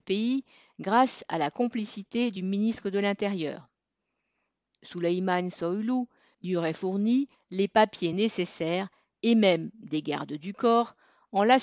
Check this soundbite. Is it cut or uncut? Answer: uncut